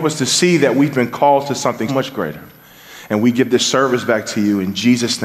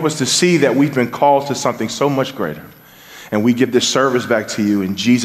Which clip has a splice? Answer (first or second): first